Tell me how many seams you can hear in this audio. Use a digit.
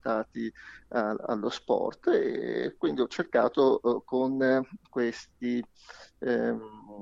1